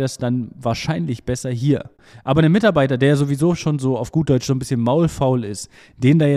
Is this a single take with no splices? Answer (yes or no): yes